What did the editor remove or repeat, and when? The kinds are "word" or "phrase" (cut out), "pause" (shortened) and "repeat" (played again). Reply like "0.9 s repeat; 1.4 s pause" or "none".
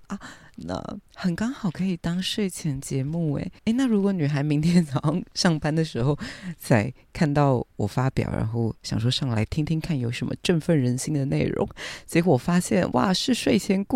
1.1 s pause; 3.6 s pause; 7.7 s pause